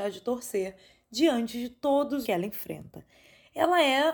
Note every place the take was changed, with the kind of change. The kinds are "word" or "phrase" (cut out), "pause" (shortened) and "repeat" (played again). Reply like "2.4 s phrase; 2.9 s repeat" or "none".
2.2 s phrase